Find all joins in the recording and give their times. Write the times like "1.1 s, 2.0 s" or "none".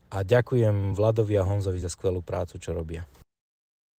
none